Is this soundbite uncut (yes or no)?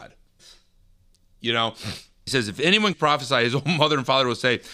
no